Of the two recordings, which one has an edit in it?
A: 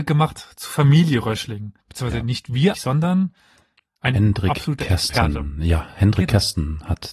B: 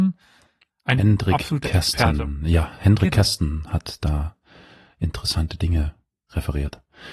A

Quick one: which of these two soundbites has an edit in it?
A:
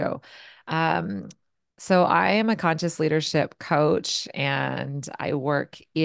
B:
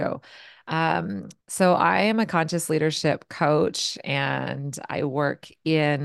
B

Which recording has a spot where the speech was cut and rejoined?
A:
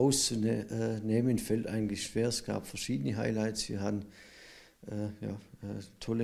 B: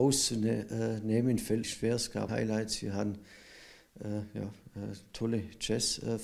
B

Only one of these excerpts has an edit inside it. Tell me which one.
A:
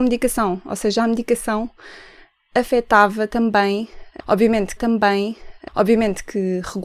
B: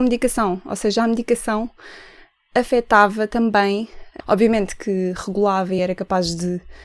A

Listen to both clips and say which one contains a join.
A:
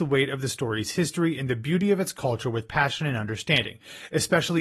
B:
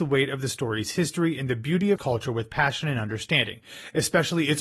B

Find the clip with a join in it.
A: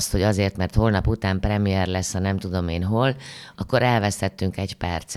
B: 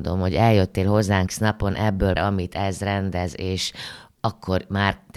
B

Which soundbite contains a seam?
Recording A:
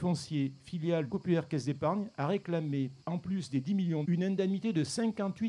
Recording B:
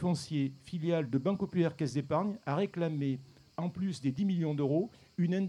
A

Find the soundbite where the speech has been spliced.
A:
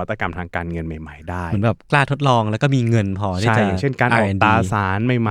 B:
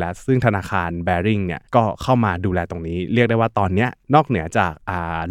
B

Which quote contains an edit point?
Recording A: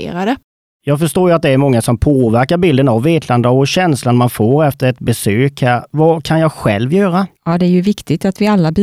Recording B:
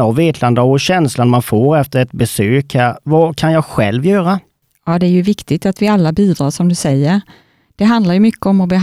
A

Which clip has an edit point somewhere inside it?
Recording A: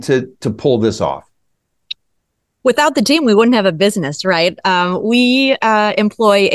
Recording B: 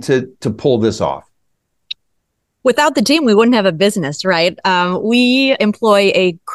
B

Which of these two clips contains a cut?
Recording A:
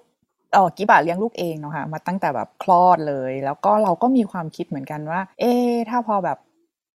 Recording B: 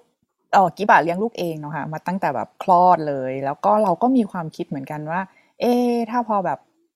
A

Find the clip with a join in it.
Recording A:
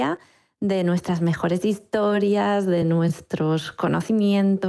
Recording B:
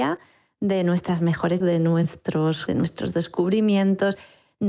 B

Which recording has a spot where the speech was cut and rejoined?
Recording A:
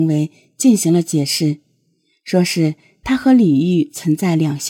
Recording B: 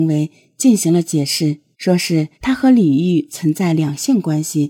B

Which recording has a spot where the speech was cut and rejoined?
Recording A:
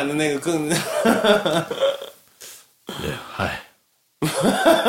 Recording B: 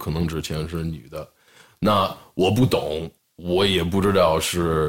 B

